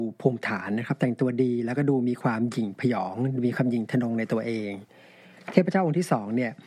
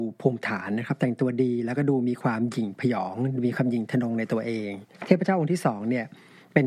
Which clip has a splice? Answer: second; 1 cut; at 4.9 s

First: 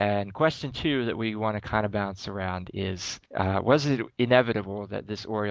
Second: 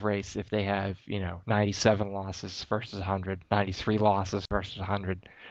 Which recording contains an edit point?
first; 1 cut; at 3.3 s

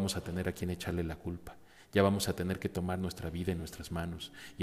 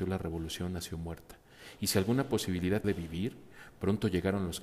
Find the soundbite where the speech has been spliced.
second; 1 cut; at 2.8 s

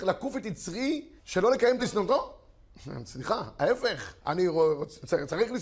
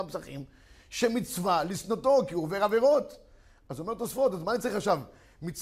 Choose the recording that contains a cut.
first; 3 cuts; at 1.2 s, 1.8 s, 4.2 s

